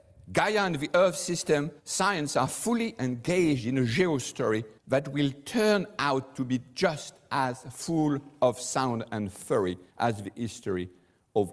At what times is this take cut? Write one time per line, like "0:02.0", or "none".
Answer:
0:01.8
0:04.8
0:09.9